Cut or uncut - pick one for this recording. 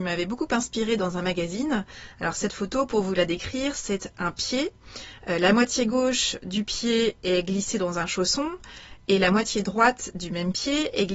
uncut